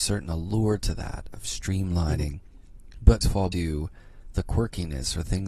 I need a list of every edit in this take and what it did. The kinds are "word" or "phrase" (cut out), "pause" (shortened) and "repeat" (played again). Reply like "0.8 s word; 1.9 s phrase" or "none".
3.2 s phrase; 3.5 s word